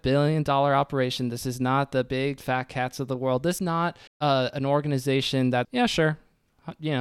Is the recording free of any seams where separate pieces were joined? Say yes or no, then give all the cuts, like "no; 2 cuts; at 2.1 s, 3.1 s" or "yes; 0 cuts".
no; 4 cuts; at 2.4 s, 3.6 s, 4.1 s, 5.6 s